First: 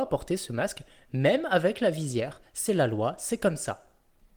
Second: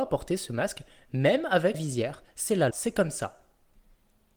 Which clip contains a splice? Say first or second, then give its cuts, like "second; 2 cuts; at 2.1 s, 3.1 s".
second; 2 cuts; at 1.7 s, 2.7 s